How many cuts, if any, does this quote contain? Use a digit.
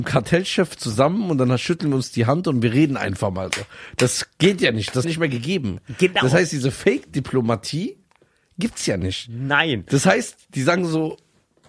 1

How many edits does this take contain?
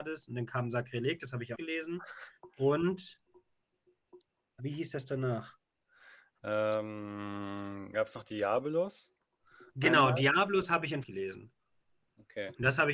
4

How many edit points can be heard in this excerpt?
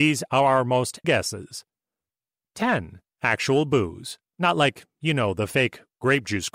3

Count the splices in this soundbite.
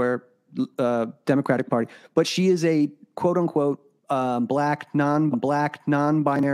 2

